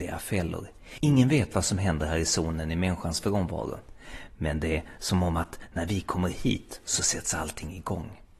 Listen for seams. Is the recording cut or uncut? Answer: uncut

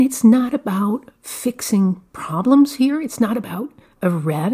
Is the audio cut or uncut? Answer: uncut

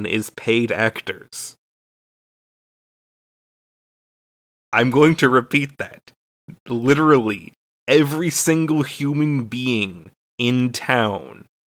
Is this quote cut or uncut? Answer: uncut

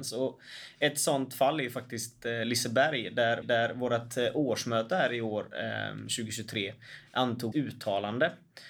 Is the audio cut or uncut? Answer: cut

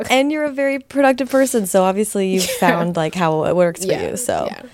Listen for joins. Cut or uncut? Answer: uncut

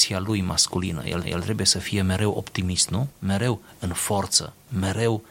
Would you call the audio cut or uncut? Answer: cut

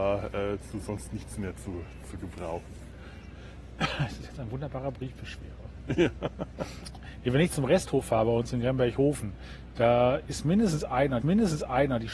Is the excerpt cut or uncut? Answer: cut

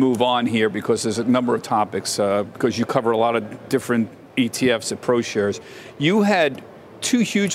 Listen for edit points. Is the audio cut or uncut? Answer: uncut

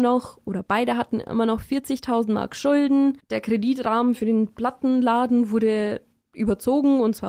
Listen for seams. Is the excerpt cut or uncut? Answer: uncut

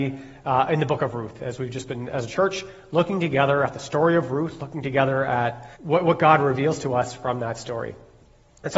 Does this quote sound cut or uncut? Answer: cut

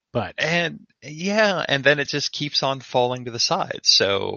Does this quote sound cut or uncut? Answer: uncut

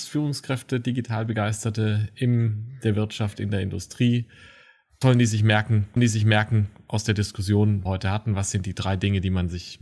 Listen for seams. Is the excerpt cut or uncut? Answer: cut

